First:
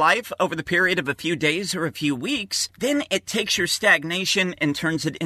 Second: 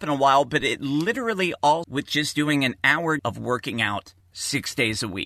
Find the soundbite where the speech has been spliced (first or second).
second